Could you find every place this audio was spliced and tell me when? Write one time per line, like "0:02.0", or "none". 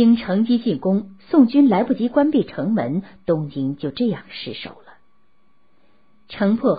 none